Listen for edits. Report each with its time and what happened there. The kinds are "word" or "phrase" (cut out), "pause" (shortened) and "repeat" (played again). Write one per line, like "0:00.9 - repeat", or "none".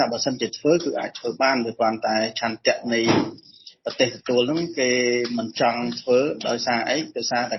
none